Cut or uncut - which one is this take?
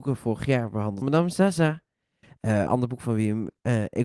cut